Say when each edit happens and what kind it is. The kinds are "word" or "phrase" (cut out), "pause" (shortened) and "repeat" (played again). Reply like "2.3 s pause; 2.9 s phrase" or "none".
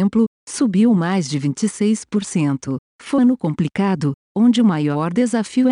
3.2 s word